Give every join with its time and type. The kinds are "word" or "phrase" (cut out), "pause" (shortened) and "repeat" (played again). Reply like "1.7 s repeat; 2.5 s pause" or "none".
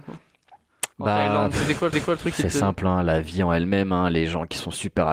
0.9 s pause; 1.9 s repeat